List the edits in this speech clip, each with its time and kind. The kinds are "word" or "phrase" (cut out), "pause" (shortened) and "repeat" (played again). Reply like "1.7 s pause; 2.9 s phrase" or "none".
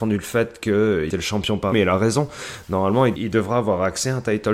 1.1 s word; 1.7 s word; 3.2 s word